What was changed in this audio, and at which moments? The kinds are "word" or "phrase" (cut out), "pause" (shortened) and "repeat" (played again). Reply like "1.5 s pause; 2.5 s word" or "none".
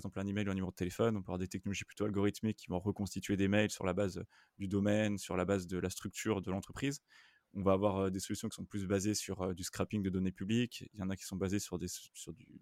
none